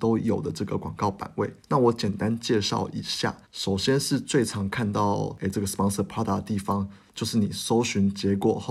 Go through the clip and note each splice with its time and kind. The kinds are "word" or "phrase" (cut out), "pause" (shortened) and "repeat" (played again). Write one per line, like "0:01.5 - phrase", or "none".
0:01.6 - pause
0:03.4 - pause